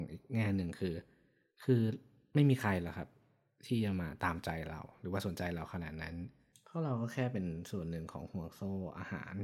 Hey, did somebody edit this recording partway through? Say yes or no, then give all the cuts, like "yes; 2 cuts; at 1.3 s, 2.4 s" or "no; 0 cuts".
no; 0 cuts